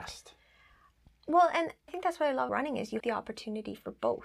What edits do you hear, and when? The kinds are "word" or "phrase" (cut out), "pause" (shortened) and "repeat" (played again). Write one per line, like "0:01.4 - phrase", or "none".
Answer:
0:01.9 - word
0:02.5 - word
0:03.0 - word